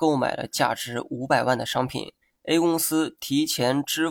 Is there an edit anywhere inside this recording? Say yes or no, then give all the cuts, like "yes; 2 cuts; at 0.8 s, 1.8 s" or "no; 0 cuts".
yes; 1 cut; at 2.2 s